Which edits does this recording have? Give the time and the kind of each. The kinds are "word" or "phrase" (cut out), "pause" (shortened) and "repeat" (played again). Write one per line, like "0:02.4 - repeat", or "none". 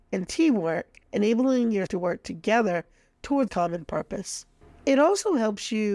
0:01.0 - pause
0:01.9 - word
0:03.5 - word